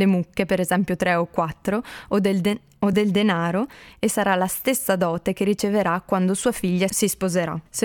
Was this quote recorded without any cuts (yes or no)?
yes